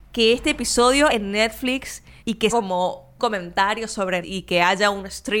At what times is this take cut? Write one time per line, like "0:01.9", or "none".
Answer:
0:01.1
0:02.2
0:02.5
0:03.2
0:04.2